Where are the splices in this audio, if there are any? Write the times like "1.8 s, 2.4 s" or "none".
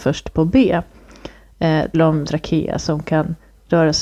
1.9 s, 2.3 s